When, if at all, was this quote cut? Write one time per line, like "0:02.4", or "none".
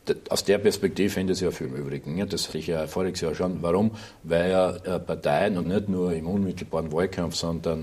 0:01.1
0:01.6
0:02.5
0:04.8
0:05.6